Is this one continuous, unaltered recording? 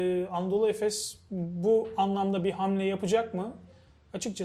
yes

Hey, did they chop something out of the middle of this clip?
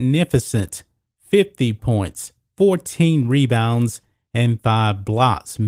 no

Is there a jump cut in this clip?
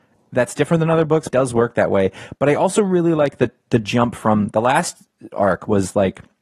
yes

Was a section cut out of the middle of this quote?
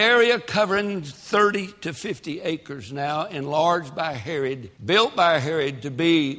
yes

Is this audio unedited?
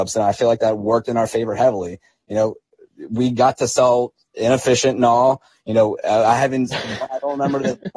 yes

